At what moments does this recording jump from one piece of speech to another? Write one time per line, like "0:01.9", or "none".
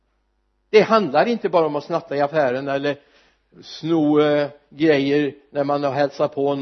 0:03.5